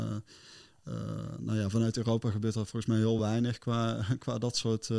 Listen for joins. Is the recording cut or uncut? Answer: uncut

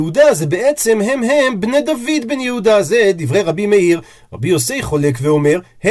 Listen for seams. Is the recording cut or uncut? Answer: uncut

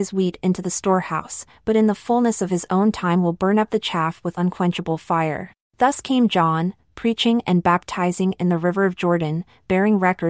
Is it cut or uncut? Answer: cut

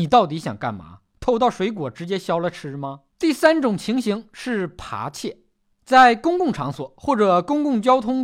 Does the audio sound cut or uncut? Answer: cut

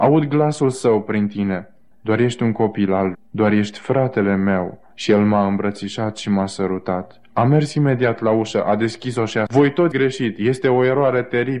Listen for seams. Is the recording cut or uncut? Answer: cut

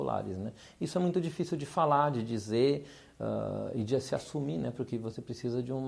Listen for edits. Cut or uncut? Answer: uncut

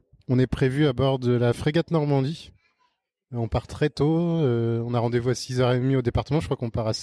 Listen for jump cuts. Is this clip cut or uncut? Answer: uncut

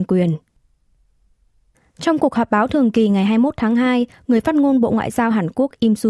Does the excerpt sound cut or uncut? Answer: uncut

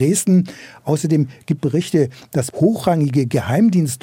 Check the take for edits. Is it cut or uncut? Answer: cut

